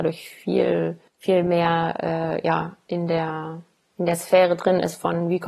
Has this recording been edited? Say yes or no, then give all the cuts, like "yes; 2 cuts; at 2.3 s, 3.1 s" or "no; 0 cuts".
yes; 1 cut; at 1.1 s